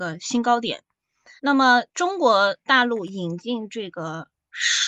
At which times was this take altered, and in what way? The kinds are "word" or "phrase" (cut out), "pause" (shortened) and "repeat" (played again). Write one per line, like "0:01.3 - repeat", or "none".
0:01.4 - pause
0:01.9 - pause